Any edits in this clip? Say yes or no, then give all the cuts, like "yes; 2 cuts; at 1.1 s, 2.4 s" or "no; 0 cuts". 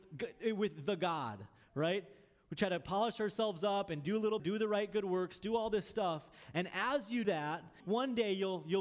yes; 3 cuts; at 4.4 s, 7.2 s, 7.8 s